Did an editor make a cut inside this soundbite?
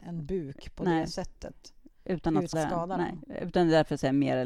yes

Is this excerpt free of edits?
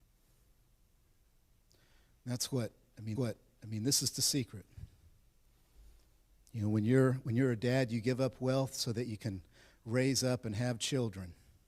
no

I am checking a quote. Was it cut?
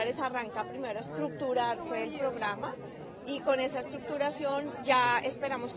no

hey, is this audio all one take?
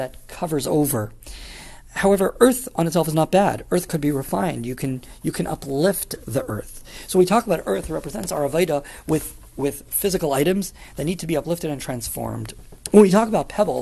yes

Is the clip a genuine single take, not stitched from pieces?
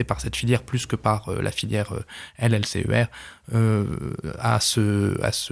yes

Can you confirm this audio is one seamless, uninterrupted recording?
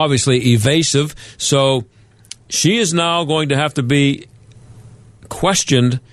yes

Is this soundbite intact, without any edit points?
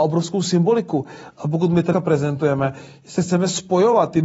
no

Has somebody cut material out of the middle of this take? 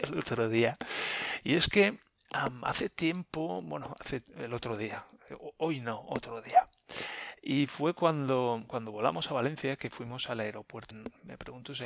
no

